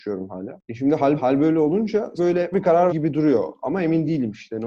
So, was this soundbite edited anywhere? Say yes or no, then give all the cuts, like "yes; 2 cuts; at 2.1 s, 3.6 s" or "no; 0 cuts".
yes; 4 cuts; at 1.2 s, 2.2 s, 2.5 s, 2.9 s